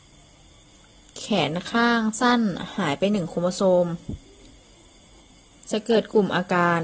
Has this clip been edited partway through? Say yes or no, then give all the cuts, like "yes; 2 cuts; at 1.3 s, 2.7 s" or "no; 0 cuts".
no; 0 cuts